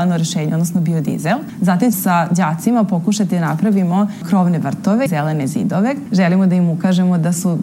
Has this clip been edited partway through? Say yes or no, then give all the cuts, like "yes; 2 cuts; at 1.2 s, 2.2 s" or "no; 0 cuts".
yes; 2 cuts; at 1.9 s, 5.1 s